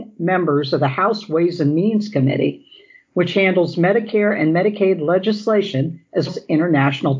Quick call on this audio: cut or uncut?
cut